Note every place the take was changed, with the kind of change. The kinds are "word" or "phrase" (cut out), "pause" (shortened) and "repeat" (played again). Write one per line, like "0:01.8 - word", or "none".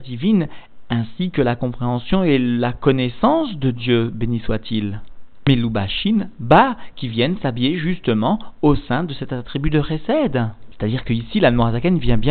none